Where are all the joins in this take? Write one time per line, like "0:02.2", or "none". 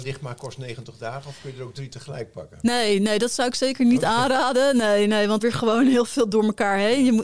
0:05.4